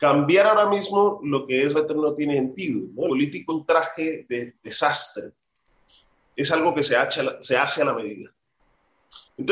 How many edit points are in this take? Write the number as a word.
three